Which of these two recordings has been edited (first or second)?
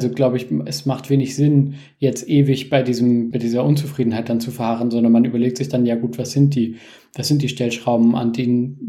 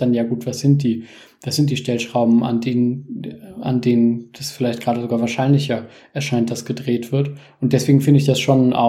first